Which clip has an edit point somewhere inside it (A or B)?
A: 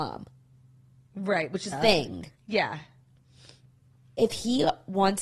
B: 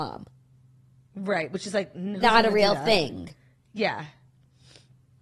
A